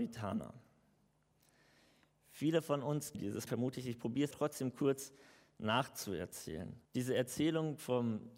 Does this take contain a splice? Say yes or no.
yes